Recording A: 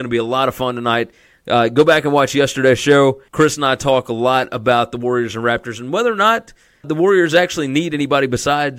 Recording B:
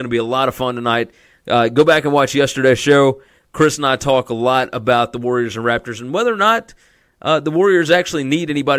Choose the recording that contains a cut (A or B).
A